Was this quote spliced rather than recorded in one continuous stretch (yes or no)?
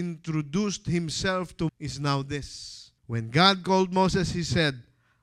yes